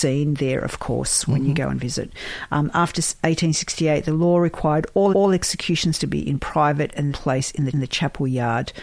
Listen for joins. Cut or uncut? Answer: cut